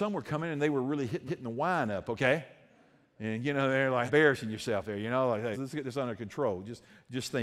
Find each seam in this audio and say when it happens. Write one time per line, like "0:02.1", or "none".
0:01.3
0:04.1
0:05.5